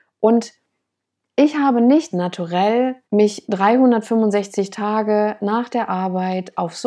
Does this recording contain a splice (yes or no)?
yes